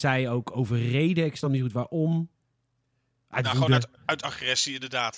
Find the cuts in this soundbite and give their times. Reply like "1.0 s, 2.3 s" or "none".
none

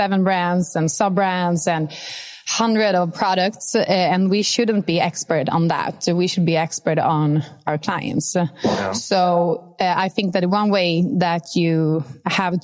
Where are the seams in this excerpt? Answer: none

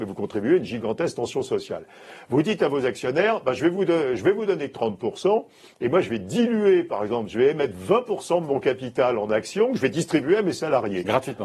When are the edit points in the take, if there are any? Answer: none

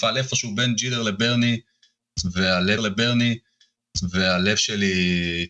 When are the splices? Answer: 2.8 s

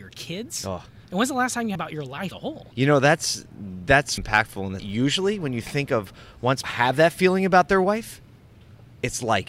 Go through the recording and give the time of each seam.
1.0 s, 1.8 s, 2.3 s, 2.7 s, 4.2 s, 4.8 s, 6.6 s

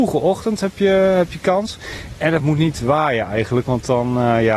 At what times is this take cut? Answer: none

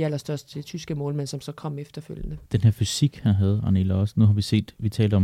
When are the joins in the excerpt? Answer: 2.5 s

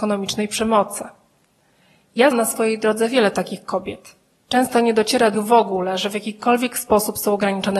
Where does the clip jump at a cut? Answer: 2.3 s, 5.3 s

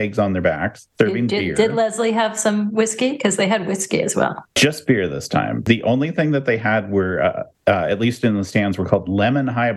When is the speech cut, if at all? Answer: 0.9 s, 7.5 s

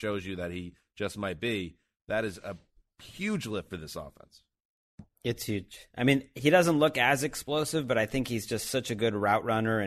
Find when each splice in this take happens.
none

